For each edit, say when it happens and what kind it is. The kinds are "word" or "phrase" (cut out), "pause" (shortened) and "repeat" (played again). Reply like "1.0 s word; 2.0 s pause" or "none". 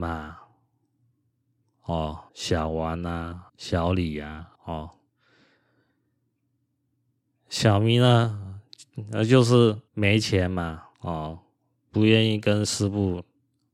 2.3 s pause; 3.5 s pause; 4.5 s pause; 9.9 s pause; 10.9 s pause